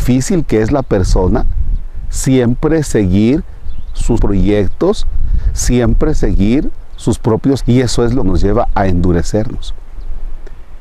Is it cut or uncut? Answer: cut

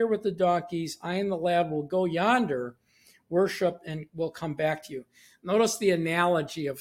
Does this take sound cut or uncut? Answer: uncut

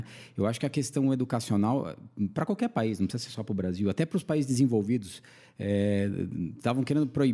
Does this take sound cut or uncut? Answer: uncut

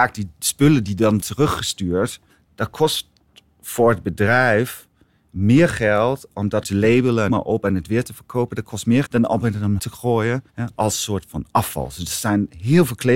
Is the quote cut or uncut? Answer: cut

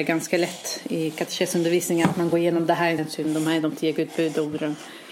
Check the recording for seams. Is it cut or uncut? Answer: cut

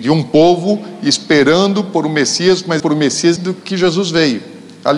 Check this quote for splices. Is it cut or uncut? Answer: cut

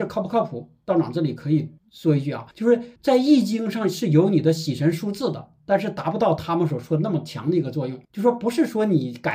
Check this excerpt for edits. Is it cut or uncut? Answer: cut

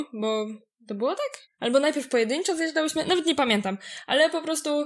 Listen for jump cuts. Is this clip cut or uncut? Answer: cut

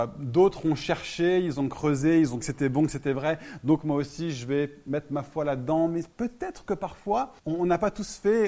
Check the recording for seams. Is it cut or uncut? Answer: cut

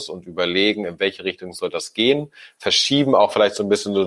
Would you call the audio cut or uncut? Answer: uncut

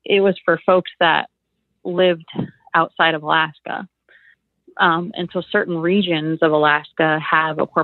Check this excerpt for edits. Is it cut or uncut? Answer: uncut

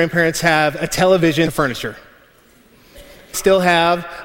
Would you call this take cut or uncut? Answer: cut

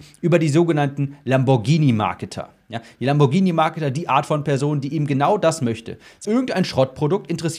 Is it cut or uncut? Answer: cut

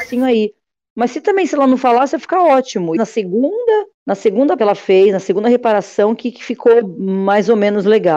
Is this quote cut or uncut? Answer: cut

